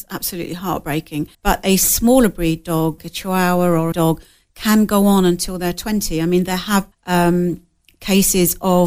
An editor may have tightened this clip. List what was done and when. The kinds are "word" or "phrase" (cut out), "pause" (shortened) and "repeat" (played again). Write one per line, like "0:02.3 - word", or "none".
0:01.3 - pause
0:03.0 - word
0:03.9 - phrase
0:06.9 - word